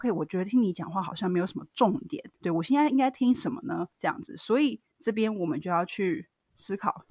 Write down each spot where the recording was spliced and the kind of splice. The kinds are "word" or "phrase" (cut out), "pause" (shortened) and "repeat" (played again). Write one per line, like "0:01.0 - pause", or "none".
0:02.3 - pause
0:03.9 - pause